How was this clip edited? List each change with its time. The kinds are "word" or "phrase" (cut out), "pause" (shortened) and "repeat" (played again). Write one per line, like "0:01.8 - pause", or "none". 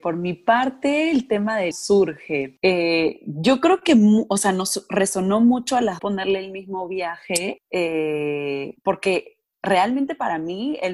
0:01.7 - phrase
0:06.0 - word